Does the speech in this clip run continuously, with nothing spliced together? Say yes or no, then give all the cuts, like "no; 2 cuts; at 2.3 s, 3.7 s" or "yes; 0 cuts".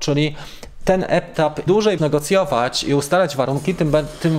no; 2 cuts; at 1.7 s, 2.0 s